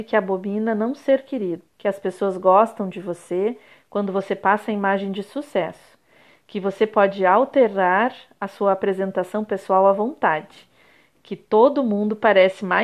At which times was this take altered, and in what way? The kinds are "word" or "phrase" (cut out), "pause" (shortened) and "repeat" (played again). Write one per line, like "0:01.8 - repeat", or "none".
0:01.7 - pause

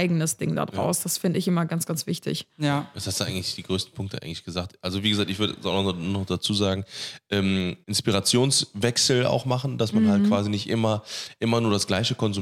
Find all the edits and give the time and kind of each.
0:07.8 - pause

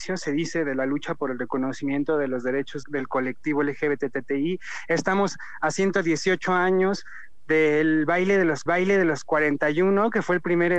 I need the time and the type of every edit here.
0:02.8 - word
0:08.7 - repeat

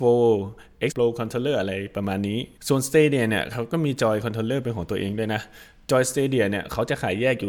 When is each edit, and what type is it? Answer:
0:00.9 - phrase
0:02.6 - pause

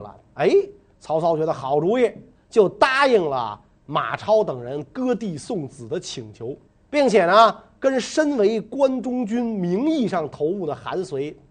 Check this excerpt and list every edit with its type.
0:06.7 - pause

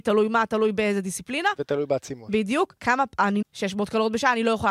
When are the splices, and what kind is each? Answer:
0:02.8 - pause
0:03.4 - phrase

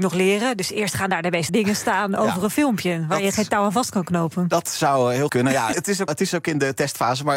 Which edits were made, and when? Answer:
0:01.5 - word
0:05.3 - word
0:05.7 - word
0:06.1 - word

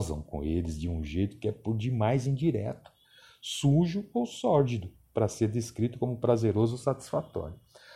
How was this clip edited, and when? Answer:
none

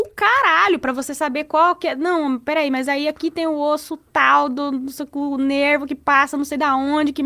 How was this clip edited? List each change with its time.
none

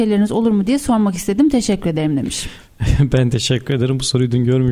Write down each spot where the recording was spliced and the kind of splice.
none

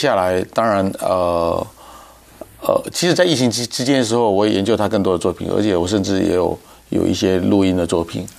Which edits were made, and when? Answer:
none

